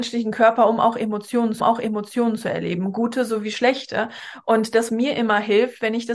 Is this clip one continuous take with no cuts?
no; 2 cuts; at 1.6 s, 4.9 s

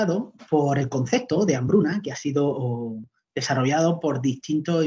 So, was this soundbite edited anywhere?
no; 0 cuts

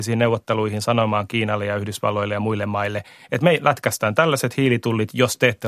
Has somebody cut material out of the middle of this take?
no; 0 cuts

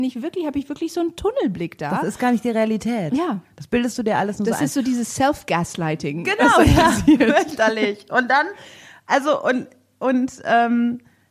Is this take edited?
no; 0 cuts

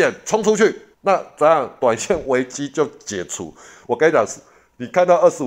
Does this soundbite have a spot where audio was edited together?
yes; 1 cut; at 0.9 s

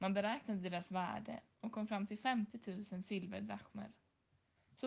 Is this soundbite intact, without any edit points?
yes; 0 cuts

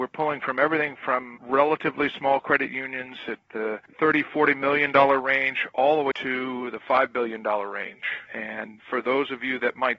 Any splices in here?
yes; 3 cuts; at 1.4 s, 6.1 s, 8.3 s

